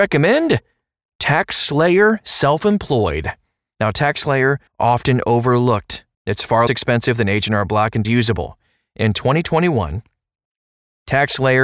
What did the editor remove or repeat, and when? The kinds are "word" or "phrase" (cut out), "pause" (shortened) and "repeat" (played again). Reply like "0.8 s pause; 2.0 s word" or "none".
4.7 s pause; 6.1 s pause; 6.7 s word; 8.0 s phrase